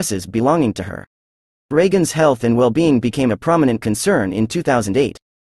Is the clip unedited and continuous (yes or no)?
yes